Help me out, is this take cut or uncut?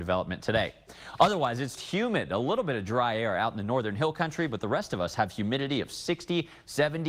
cut